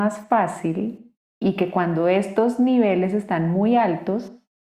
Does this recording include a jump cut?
no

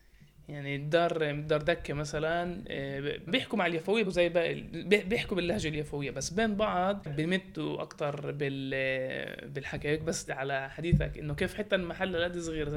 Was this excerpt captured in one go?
no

